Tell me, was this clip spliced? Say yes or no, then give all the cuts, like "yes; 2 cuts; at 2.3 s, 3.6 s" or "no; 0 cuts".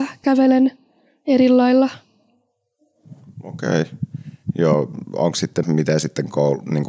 yes; 1 cut; at 5.6 s